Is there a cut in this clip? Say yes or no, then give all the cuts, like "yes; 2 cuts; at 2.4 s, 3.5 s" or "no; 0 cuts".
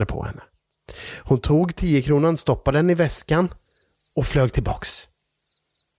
no; 0 cuts